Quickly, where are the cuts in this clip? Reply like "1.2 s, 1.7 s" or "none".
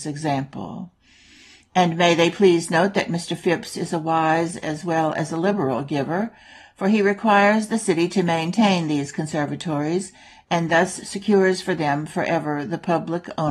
none